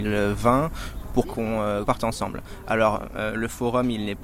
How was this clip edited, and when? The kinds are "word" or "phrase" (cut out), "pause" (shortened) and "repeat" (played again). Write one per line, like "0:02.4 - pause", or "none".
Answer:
0:01.2 - word
0:01.8 - word